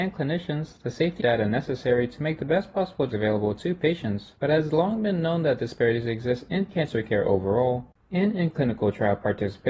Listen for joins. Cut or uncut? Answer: cut